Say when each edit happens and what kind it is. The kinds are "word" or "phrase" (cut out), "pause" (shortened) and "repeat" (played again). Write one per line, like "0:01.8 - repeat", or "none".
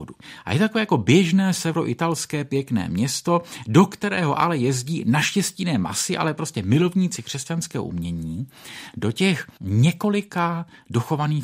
0:09.6 - pause